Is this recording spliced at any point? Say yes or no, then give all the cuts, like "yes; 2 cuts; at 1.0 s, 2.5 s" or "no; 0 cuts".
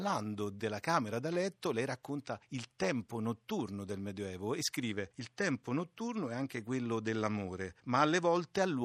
no; 0 cuts